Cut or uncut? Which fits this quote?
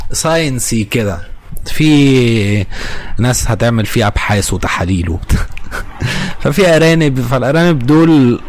uncut